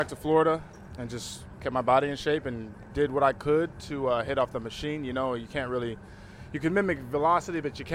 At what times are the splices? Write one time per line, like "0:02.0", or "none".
none